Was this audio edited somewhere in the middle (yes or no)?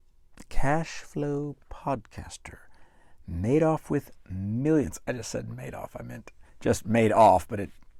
yes